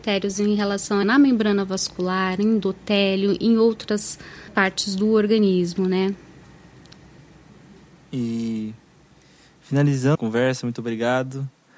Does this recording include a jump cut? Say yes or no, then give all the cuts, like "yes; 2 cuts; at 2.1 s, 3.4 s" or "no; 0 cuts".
yes; 3 cuts; at 1.0 s, 4.5 s, 10.1 s